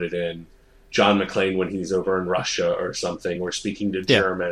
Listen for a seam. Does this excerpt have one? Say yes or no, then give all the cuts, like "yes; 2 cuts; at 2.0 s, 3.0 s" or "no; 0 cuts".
no; 0 cuts